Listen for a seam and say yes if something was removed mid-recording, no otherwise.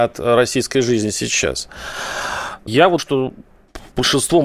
yes